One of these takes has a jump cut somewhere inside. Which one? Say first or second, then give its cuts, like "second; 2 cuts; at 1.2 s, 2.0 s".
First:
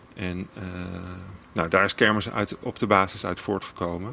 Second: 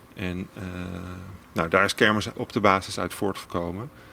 second; 1 cut; at 2.3 s